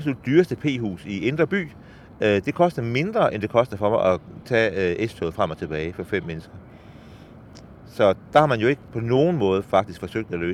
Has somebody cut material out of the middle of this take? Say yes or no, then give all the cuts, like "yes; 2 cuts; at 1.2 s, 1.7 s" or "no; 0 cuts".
no; 0 cuts